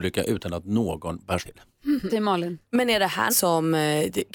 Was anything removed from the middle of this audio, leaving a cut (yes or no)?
yes